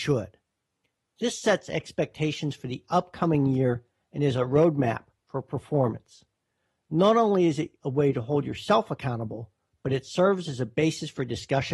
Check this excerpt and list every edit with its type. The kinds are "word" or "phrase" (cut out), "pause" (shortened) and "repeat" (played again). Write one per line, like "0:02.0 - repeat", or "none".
none